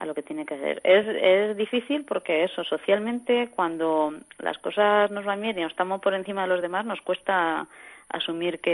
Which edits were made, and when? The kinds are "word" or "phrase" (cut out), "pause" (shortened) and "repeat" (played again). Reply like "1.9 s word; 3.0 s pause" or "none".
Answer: none